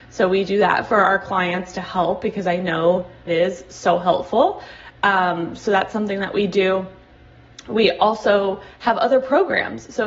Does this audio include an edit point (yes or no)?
yes